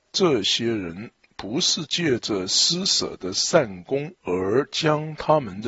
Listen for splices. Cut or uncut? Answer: cut